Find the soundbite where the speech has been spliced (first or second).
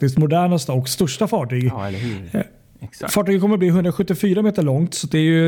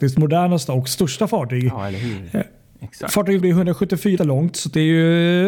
second